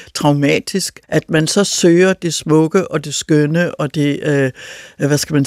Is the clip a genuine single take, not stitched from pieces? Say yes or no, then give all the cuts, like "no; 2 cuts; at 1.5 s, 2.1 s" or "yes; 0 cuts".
no; 1 cut; at 1.0 s